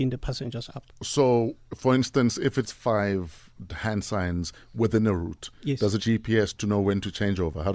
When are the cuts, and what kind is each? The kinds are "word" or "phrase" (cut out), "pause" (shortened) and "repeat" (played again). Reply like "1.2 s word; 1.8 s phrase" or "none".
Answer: 2.6 s word; 3.7 s word; 6.0 s word